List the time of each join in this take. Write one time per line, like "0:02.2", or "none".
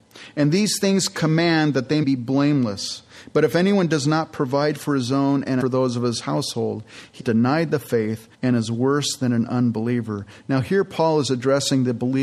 0:02.0
0:05.6
0:07.2
0:08.3